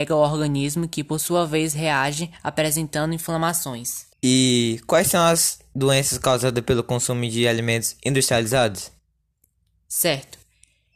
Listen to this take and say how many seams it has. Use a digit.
1